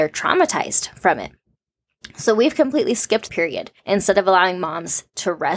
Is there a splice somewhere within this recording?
yes; 2 cuts; at 3.3 s, 3.8 s

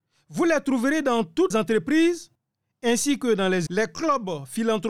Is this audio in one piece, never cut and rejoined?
no; 2 cuts; at 1.5 s, 3.7 s

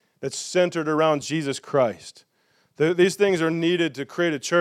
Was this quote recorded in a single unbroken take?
yes; 0 cuts

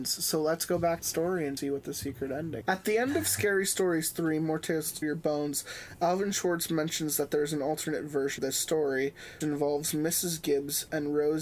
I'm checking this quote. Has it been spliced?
yes; 6 cuts; at 1.0 s, 1.6 s, 2.6 s, 5.0 s, 8.4 s, 9.4 s

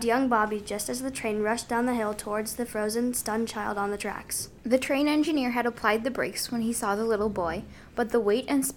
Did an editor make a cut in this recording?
no; 0 cuts

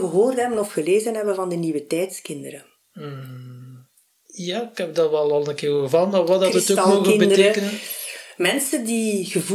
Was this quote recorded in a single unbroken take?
yes; 0 cuts

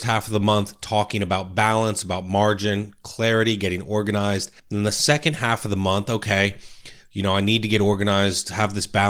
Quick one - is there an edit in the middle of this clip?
yes; 1 cut; at 4.6 s

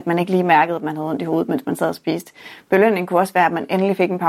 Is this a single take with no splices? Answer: yes; 0 cuts

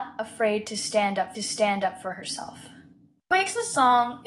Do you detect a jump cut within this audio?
yes; 1 cut; at 1.4 s

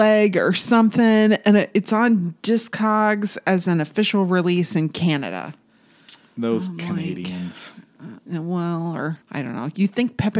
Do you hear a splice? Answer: yes; 1 cut; at 9.2 s

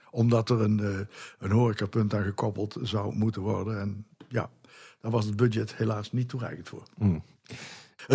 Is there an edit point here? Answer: no; 0 cuts

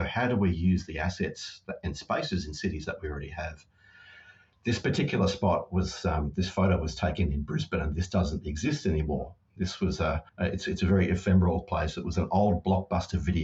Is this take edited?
yes; 1 cut; at 10.3 s

